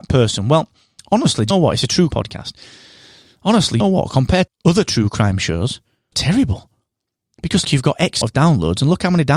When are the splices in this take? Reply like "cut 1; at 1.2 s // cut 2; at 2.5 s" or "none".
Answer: cut 1; at 1.5 s // cut 2; at 2.1 s // cut 3; at 3.8 s // cut 4; at 4.5 s // cut 5; at 6.1 s // cut 6; at 7.6 s // cut 7; at 8.2 s